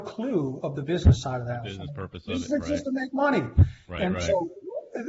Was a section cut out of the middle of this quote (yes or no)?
no